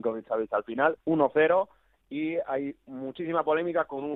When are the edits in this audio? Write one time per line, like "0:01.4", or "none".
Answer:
0:01.0